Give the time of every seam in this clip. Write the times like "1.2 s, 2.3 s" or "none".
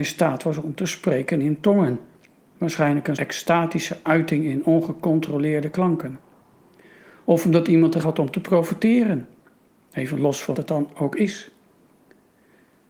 3.2 s, 8.0 s, 10.5 s